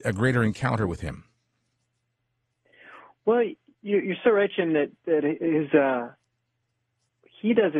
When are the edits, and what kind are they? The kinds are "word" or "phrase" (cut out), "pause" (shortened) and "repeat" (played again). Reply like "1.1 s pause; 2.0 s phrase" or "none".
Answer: none